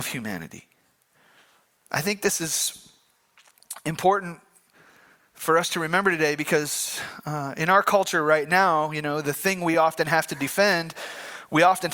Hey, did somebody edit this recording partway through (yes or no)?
no